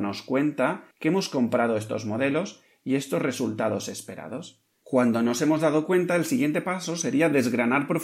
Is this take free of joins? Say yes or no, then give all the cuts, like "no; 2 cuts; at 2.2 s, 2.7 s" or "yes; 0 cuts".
no; 1 cut; at 0.9 s